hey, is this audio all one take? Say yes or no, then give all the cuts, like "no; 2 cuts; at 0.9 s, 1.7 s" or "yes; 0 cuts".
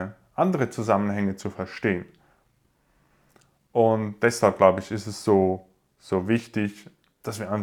yes; 0 cuts